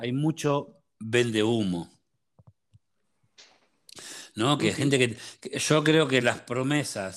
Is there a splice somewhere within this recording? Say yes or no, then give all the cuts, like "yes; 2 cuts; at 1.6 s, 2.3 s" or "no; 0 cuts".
no; 0 cuts